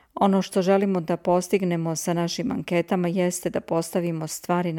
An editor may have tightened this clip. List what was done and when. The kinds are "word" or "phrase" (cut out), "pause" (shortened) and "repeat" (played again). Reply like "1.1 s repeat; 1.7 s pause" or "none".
none